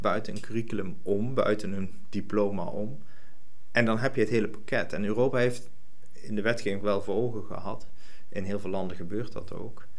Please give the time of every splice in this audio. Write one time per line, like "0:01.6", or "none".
0:06.8